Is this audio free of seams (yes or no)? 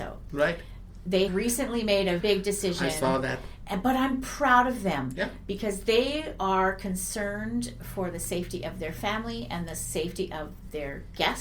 no